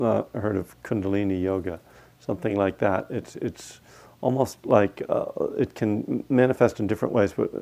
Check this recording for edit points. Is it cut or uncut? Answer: uncut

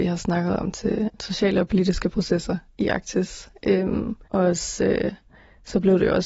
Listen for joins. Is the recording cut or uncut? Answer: cut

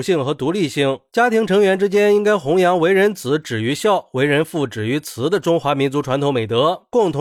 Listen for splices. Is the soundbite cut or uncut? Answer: uncut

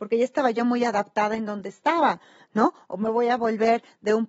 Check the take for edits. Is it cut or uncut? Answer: uncut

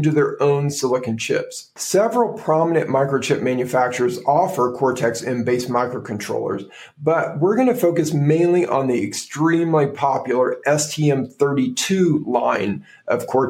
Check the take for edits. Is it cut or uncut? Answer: uncut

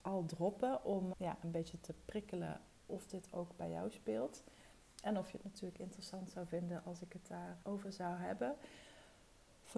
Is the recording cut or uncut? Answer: cut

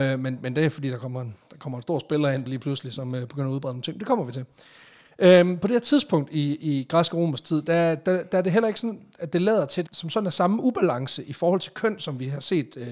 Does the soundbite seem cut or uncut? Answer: cut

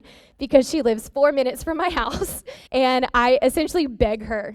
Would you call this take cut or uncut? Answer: cut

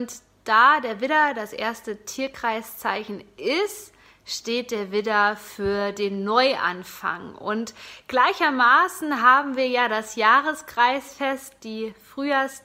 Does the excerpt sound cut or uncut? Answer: uncut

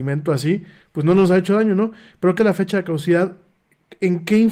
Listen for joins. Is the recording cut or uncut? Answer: cut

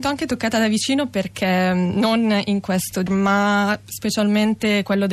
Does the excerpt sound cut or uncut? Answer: cut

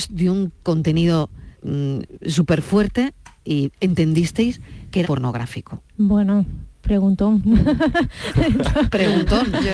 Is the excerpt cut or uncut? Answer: cut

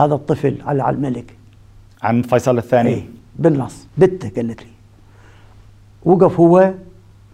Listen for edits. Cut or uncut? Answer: cut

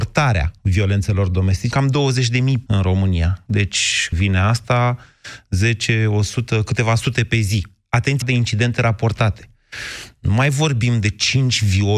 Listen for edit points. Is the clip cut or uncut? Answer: cut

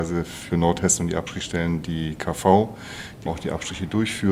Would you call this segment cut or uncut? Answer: cut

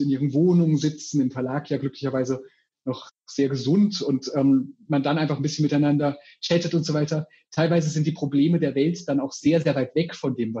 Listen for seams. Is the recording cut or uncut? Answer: uncut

